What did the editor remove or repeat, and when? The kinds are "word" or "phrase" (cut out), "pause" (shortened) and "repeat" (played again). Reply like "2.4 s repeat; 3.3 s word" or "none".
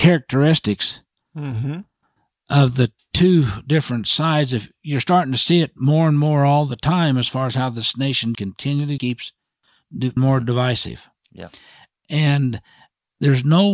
8.3 s word; 9.0 s word; 10.2 s word